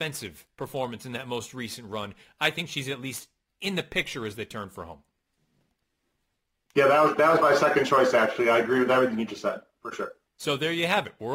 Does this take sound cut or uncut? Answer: uncut